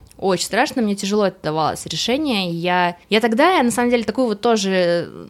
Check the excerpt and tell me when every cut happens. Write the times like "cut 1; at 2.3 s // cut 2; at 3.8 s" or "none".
cut 1; at 3.0 s